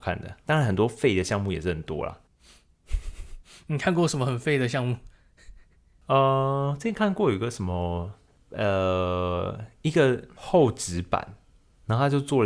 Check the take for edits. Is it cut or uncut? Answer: uncut